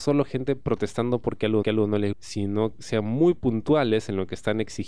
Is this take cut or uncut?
cut